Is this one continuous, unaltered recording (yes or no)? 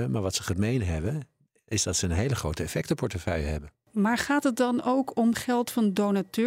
yes